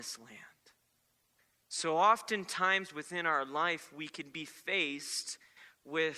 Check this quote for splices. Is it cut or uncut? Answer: uncut